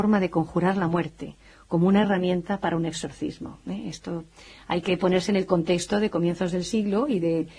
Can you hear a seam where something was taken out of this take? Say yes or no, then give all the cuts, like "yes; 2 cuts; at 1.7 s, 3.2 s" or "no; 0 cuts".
no; 0 cuts